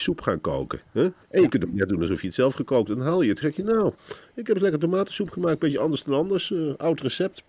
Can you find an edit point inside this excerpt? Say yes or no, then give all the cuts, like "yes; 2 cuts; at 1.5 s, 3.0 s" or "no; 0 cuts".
yes; 3 cuts; at 1.2 s, 3.4 s, 4.0 s